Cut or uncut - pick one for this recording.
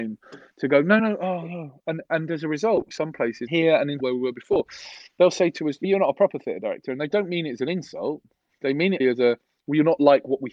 cut